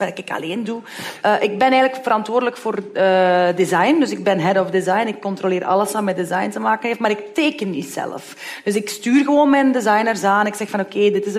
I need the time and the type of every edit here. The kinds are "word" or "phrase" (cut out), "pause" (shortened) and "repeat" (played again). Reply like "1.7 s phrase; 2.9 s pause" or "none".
none